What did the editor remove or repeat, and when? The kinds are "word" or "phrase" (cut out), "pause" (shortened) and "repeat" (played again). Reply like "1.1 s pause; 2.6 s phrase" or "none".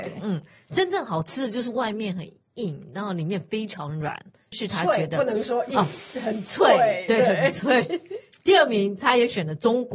none

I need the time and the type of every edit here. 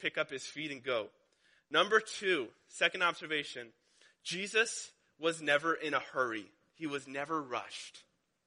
none

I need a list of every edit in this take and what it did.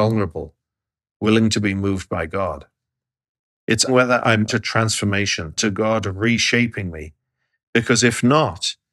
3.9 s word; 4.5 s word; 5.6 s word

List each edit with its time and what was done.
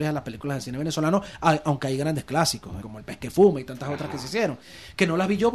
2.8 s word

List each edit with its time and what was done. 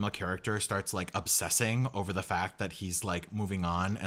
none

